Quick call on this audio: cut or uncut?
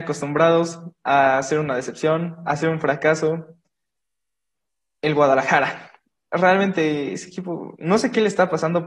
uncut